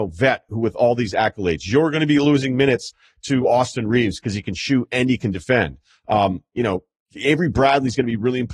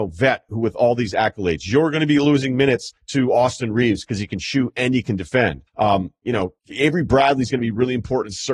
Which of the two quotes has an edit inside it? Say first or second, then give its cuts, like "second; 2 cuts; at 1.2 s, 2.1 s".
second; 3 cuts; at 3.0 s, 5.7 s, 6.6 s